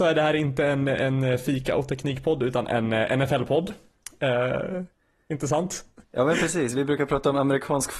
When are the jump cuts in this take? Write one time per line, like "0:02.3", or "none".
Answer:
0:06.0